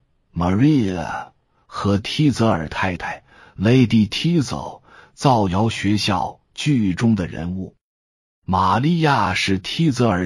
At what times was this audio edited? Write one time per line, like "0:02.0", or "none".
none